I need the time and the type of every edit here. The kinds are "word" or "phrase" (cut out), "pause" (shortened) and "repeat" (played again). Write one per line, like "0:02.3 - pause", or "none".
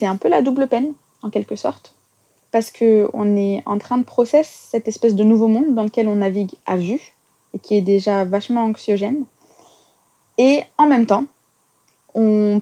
none